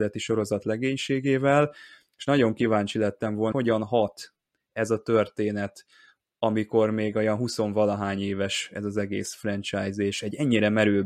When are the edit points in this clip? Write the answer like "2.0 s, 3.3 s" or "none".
3.5 s